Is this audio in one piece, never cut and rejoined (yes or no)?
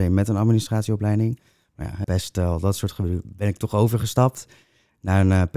no